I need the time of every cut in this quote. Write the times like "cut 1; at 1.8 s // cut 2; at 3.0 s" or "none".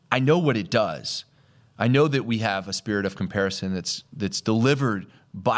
none